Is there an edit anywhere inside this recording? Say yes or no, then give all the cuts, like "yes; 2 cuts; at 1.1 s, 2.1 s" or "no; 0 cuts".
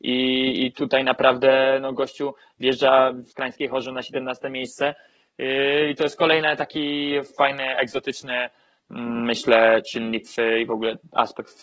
no; 0 cuts